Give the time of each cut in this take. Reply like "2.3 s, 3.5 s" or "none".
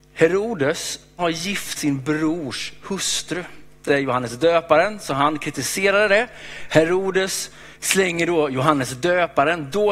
1.2 s, 1.8 s, 3.9 s, 7.7 s